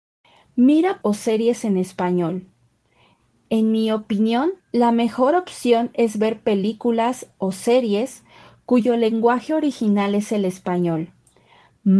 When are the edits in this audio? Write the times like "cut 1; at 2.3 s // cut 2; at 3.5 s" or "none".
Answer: cut 1; at 1.0 s // cut 2; at 4.6 s